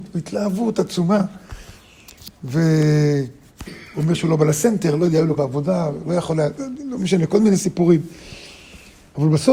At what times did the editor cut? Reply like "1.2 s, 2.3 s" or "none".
2.3 s, 5.4 s